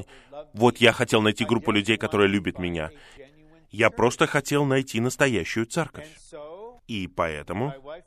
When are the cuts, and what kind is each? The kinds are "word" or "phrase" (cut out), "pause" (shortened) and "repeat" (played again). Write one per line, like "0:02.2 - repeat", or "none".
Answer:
0:06.8 - pause